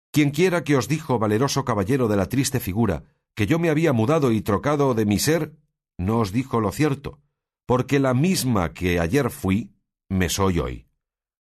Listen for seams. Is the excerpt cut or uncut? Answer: uncut